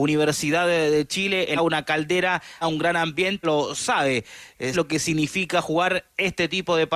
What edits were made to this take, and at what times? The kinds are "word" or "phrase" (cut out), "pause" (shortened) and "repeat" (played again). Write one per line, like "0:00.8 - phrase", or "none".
0:01.6 - phrase
0:02.6 - word
0:03.4 - phrase
0:04.7 - word

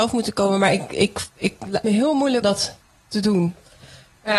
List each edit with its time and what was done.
0:01.8 - phrase
0:02.4 - word
0:02.8 - pause

